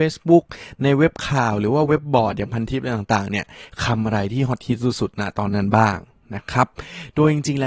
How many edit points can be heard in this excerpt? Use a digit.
0